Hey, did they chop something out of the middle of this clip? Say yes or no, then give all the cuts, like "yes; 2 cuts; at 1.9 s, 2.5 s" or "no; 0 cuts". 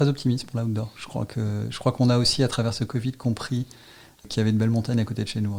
no; 0 cuts